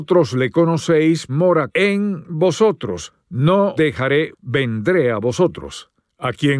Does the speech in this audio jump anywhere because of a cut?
yes; 4 cuts; at 1.3 s, 1.7 s, 3.8 s, 4.3 s

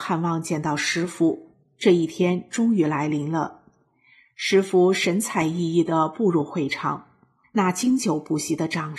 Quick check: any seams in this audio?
no; 0 cuts

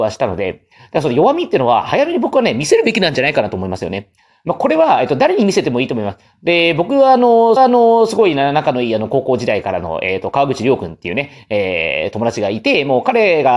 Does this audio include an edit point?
yes; 1 cut; at 7.6 s

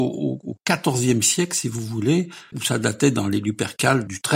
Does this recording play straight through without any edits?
no; 1 cut; at 2.5 s

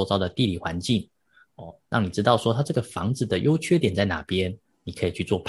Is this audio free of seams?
yes; 0 cuts

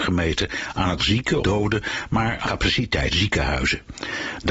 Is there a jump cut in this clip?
yes; 4 cuts; at 1.0 s, 1.4 s, 2.4 s, 3.1 s

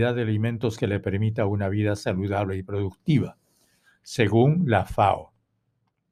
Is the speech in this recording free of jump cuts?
yes; 0 cuts

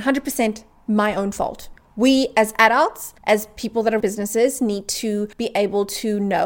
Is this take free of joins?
no; 3 cuts; at 3.2 s, 4.0 s, 5.3 s

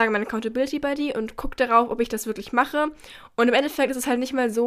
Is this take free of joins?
yes; 0 cuts

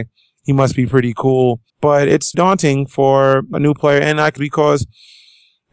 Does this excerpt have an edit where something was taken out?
yes; 4 cuts; at 1.7 s, 2.3 s, 3.5 s, 4.4 s

